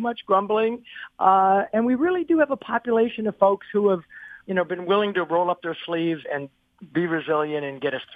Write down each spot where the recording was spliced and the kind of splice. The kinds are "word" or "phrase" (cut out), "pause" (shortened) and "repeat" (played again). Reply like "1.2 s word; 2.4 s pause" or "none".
4.4 s phrase; 6.2 s word